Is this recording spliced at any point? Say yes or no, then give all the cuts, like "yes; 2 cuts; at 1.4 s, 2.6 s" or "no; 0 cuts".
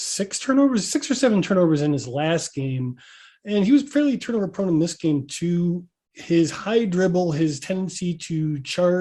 no; 0 cuts